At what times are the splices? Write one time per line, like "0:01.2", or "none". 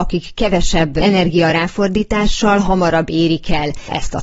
none